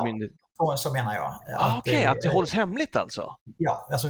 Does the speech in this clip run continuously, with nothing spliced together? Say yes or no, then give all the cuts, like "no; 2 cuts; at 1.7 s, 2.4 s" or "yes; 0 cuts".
yes; 0 cuts